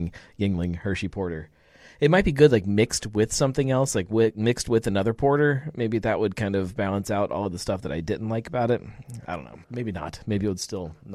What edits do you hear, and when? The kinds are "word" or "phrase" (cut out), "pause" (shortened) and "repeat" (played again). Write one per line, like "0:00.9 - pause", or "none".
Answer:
0:09.6 - pause